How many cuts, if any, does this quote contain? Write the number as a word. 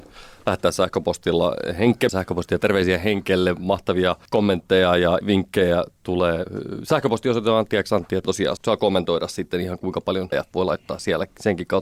six